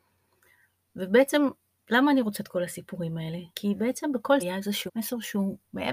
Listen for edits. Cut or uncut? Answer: cut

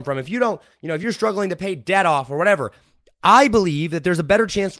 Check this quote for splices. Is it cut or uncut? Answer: uncut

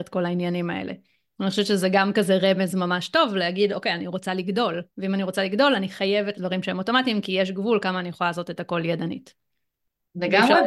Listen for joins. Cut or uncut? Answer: cut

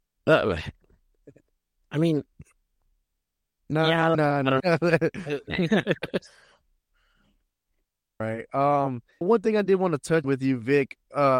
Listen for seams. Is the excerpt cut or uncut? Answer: cut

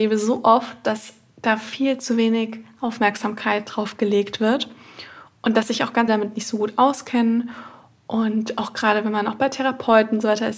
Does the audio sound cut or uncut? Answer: cut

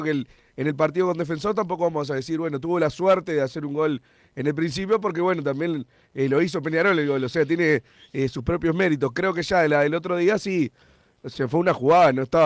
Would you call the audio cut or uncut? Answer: uncut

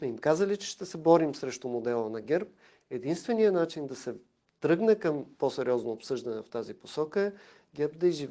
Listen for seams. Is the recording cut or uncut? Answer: uncut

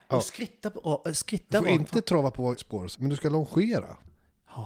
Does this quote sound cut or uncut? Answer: cut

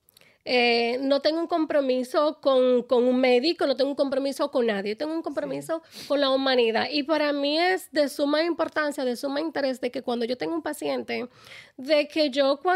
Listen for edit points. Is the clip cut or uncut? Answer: cut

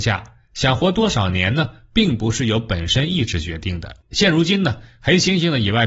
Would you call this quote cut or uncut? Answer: cut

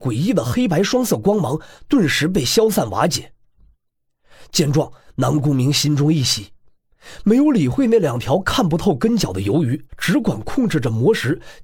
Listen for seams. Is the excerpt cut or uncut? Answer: cut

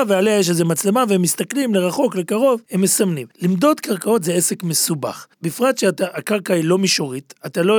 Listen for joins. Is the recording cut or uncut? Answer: cut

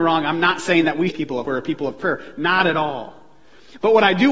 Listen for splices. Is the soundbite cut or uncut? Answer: cut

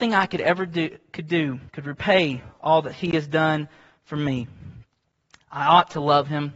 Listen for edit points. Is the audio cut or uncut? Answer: cut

